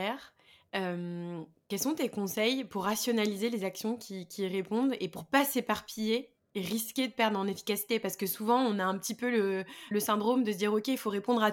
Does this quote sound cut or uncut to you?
cut